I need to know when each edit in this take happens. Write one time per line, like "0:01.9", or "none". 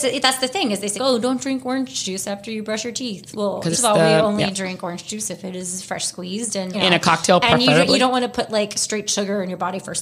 0:01.0
0:03.7
0:06.7